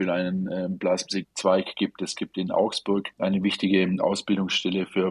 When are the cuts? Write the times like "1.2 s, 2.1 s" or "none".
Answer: none